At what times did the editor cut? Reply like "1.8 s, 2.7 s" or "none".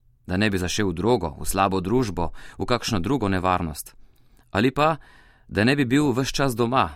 none